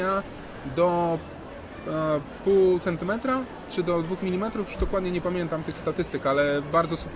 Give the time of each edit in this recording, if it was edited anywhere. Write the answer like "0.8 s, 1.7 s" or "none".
none